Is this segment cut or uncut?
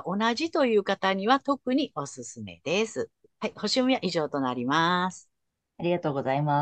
cut